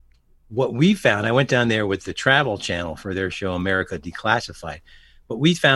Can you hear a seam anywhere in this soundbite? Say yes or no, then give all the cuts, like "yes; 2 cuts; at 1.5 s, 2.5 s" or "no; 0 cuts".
no; 0 cuts